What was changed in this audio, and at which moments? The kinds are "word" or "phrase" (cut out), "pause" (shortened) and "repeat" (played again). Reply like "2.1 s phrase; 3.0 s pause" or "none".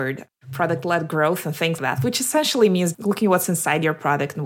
1.8 s word; 2.9 s word